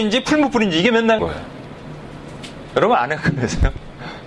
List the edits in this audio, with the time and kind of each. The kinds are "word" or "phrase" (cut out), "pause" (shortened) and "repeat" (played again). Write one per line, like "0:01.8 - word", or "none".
0:01.2 - word